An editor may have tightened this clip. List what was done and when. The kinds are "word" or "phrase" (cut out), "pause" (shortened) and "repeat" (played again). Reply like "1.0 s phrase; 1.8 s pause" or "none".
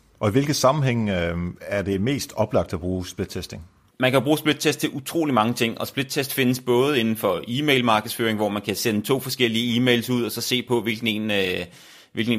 none